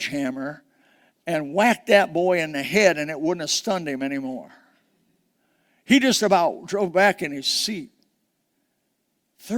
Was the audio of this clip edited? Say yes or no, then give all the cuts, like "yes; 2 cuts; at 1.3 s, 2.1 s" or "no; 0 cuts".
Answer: no; 0 cuts